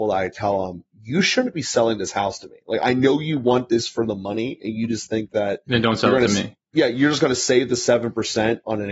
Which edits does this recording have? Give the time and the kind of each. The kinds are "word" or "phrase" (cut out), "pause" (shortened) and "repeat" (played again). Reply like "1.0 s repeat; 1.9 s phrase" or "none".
none